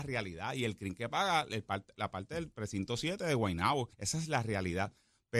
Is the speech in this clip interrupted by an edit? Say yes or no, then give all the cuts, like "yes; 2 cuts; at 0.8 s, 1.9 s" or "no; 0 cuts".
yes; 1 cut; at 3.9 s